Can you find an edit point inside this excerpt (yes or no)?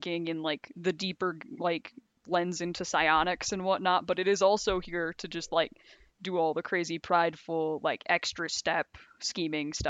no